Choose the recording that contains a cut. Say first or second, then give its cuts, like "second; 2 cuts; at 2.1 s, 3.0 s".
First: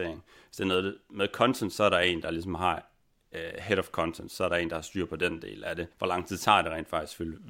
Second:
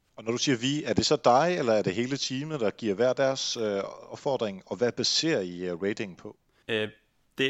first; 1 cut; at 5.9 s